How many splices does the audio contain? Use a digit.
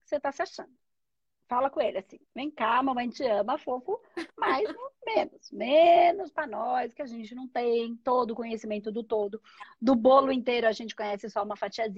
1